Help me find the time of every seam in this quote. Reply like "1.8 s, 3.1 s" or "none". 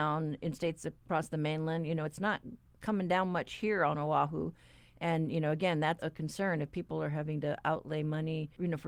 6.0 s